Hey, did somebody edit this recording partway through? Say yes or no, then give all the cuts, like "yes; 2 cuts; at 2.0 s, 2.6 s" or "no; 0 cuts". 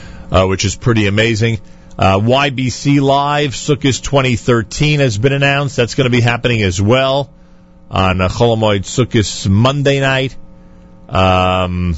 no; 0 cuts